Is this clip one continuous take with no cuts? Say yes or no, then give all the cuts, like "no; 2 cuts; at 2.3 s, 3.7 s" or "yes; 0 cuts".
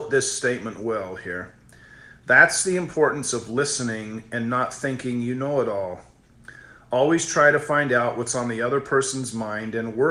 yes; 0 cuts